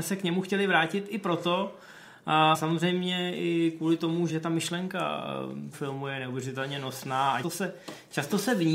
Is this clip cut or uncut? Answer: cut